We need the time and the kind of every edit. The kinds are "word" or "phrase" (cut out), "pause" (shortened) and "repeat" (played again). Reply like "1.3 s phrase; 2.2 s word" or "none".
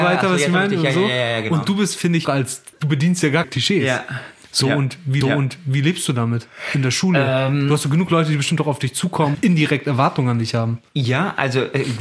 2.2 s phrase; 2.7 s pause; 3.4 s phrase; 5.2 s repeat; 9.3 s word; 10.9 s pause

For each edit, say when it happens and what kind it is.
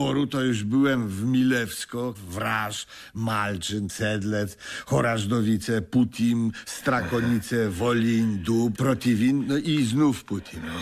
2.1 s word; 3.9 s word; 6.6 s word; 8.7 s word

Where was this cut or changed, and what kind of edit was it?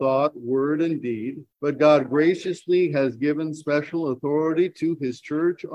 1.5 s pause

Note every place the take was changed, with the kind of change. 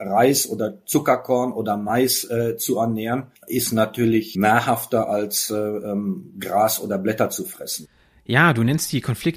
3.4 s pause; 4.3 s word

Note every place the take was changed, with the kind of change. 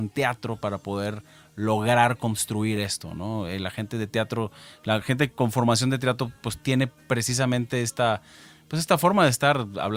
none

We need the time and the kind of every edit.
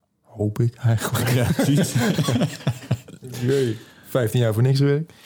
3.9 s pause

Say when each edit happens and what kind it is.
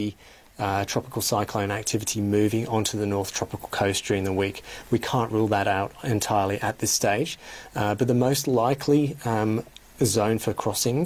none

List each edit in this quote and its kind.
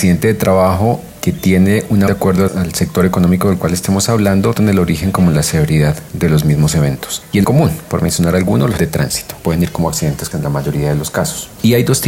2.1 s word; 2.5 s word; 4.6 s word; 7.4 s word; 8.8 s word; 10.3 s word

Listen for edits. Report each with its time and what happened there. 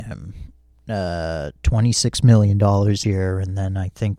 3.0 s word

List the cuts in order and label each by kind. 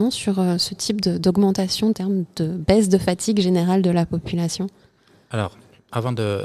1.9 s phrase

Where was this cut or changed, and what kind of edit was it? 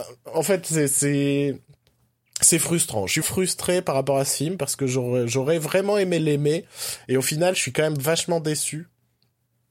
3.2 s word

